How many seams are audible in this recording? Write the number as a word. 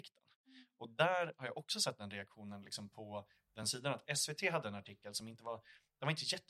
zero